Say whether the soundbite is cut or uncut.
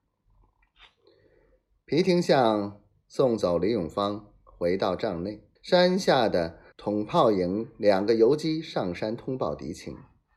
cut